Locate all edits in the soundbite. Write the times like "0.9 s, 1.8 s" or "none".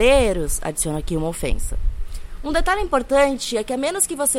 none